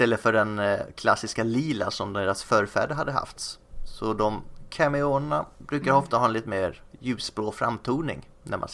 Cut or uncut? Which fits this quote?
uncut